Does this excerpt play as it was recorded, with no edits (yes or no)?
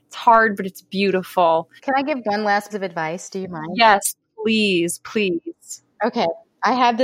no